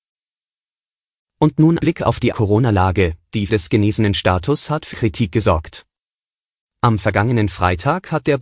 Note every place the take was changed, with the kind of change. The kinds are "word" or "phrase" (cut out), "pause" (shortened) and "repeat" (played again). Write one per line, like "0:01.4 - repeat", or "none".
0:01.8 - word
0:02.3 - word
0:03.5 - word
0:04.9 - word